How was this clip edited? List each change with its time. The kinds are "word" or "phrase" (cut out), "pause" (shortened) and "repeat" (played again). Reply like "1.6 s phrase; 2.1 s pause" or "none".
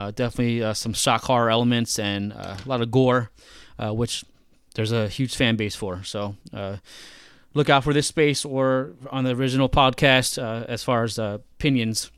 none